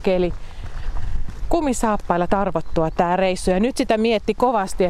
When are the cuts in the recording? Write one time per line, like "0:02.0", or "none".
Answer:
0:02.3